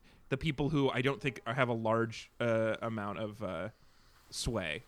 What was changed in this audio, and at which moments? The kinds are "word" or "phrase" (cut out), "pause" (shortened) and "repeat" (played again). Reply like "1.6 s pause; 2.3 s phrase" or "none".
none